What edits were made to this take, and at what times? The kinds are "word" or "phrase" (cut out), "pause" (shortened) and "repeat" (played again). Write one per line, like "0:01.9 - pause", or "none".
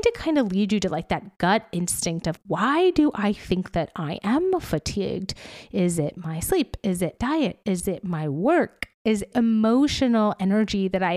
0:02.4 - word
0:07.2 - word
0:09.3 - phrase